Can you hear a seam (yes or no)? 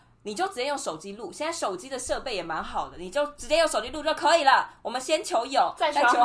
no